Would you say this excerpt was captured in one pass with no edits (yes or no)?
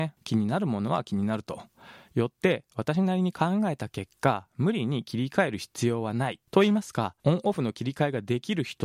no